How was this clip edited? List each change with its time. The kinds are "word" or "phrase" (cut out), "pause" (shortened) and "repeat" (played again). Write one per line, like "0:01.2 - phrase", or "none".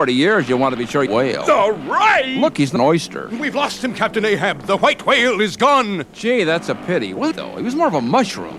0:01.1 - phrase
0:02.8 - word
0:07.3 - phrase